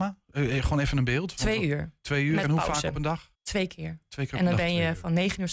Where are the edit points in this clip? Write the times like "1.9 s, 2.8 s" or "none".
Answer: 3.3 s